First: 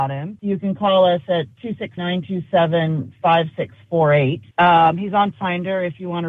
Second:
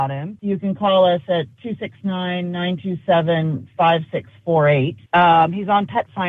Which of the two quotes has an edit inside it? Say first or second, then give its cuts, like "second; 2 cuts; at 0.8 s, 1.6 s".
first; 2 cuts; at 2.0 s, 5.3 s